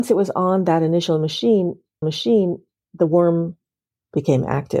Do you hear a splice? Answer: yes; 1 cut; at 2.0 s

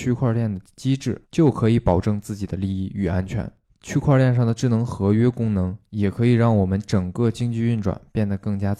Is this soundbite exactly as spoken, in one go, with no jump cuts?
no; 2 cuts; at 1.2 s, 3.6 s

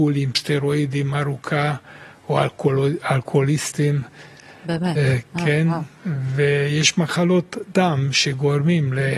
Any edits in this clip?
no; 0 cuts

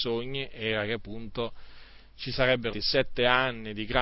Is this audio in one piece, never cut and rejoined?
no; 1 cut; at 2.7 s

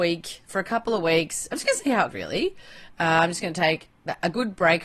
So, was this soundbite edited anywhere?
yes; 1 cut; at 2.1 s

